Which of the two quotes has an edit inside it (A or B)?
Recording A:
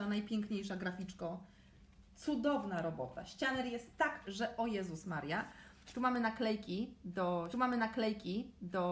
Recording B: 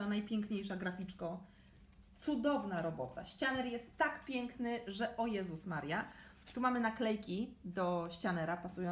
A